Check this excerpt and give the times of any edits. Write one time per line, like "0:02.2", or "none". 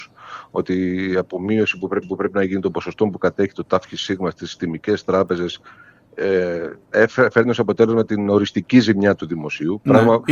0:02.0